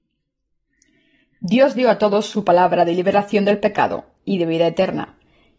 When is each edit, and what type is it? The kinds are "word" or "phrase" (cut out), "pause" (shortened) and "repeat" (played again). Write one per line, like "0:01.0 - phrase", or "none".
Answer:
none